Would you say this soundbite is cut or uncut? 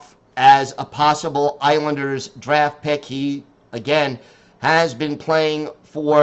uncut